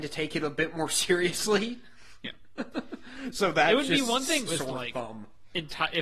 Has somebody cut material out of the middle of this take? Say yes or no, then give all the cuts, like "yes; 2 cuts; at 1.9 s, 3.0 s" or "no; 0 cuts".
yes; 1 cut; at 4.5 s